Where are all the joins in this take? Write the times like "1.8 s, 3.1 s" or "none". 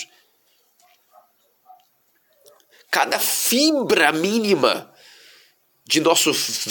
none